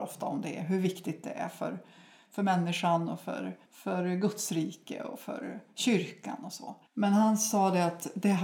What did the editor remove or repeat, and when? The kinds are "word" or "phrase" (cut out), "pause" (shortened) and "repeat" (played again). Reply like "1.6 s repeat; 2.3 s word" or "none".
3.7 s pause; 6.9 s pause